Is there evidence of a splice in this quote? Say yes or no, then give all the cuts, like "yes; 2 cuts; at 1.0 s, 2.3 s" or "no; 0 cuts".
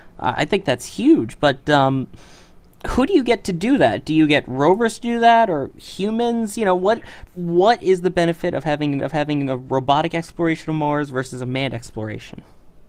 yes; 2 cuts; at 7.3 s, 9.0 s